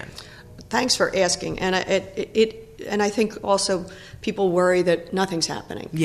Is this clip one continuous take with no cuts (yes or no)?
yes